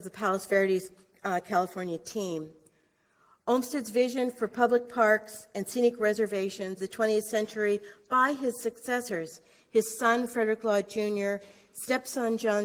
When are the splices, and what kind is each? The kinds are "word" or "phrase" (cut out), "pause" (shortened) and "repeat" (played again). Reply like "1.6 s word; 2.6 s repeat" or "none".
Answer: 6.8 s phrase